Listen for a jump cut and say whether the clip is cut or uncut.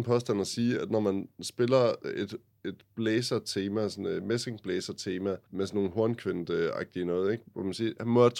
uncut